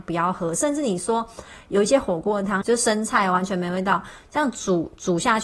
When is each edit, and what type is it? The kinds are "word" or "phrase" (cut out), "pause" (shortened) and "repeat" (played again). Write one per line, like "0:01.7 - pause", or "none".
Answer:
0:02.6 - phrase